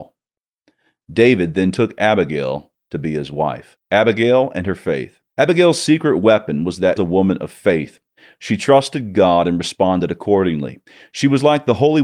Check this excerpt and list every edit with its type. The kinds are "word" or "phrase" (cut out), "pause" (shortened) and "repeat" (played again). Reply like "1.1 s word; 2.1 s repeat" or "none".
3.8 s pause; 5.3 s pause; 7.0 s phrase